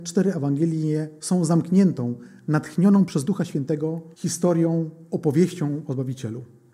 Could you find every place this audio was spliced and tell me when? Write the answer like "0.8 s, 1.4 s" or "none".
4.1 s